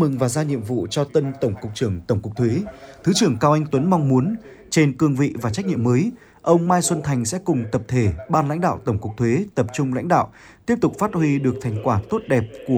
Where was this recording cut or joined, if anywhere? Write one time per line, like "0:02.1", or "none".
none

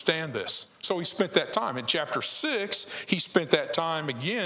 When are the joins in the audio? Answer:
none

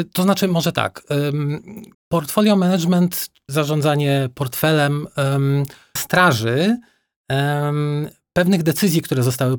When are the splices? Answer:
0:01.9
0:03.5
0:06.0

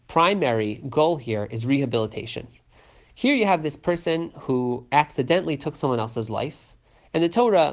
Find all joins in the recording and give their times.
none

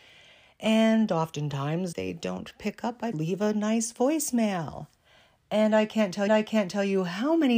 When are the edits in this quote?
0:01.9
0:03.1
0:06.3

